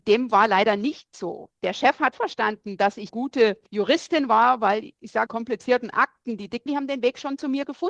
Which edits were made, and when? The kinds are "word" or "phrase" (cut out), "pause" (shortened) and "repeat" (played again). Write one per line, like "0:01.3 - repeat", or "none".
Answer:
0:02.1 - word
0:03.1 - word
0:03.7 - pause
0:05.3 - phrase
0:06.7 - word